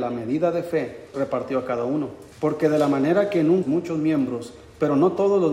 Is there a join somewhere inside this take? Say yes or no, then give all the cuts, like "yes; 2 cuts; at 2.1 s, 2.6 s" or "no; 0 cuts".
yes; 3 cuts; at 1.1 s, 2.3 s, 3.6 s